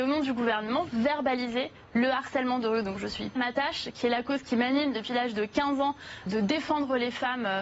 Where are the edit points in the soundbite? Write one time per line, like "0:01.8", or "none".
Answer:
0:03.4
0:06.3